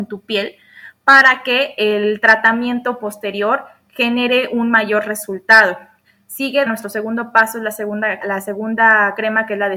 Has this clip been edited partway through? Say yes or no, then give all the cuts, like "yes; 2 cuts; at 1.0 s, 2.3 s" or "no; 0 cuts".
yes; 2 cuts; at 6.7 s, 8.2 s